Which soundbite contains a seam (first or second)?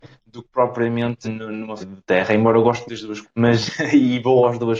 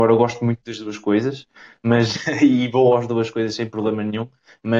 first